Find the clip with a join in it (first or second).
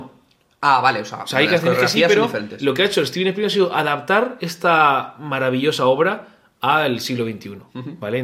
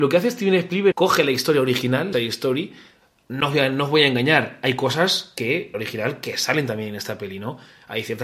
second